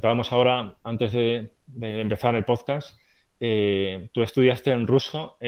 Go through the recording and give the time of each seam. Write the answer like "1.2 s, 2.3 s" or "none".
none